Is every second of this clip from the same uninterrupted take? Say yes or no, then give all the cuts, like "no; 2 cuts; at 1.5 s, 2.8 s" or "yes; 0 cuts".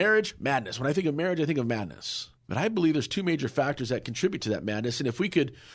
no; 1 cut; at 2.4 s